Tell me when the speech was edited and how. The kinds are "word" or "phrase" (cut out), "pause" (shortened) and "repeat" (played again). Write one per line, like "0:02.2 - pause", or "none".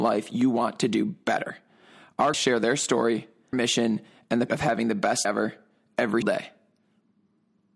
0:02.3 - word
0:03.5 - word
0:04.5 - word
0:05.2 - word
0:06.2 - word